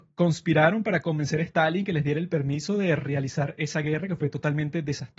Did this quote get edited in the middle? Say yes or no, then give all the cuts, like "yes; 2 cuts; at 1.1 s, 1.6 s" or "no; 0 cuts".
no; 0 cuts